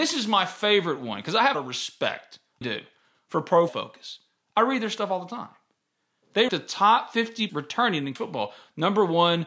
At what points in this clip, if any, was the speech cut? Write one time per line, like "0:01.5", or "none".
0:01.5
0:02.6
0:03.7
0:06.5
0:07.5
0:08.2